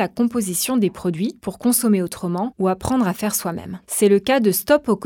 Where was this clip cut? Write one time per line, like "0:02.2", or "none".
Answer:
none